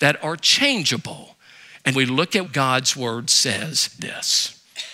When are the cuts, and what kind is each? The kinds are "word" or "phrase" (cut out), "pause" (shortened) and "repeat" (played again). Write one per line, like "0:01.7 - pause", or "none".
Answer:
0:01.9 - word
0:02.4 - word
0:04.0 - word